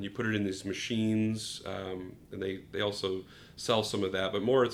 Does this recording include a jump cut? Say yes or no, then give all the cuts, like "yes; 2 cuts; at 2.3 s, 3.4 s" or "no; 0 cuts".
no; 0 cuts